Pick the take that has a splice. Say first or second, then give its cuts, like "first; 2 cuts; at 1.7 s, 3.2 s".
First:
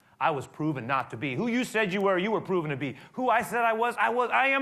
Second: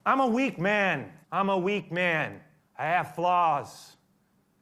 second; 2 cuts; at 1.2 s, 2.6 s